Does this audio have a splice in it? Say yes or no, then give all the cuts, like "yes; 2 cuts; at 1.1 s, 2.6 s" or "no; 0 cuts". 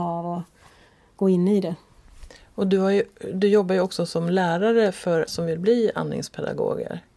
yes; 1 cut; at 5.3 s